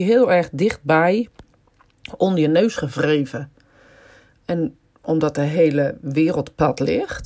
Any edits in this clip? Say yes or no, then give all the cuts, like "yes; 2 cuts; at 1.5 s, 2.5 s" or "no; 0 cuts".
no; 0 cuts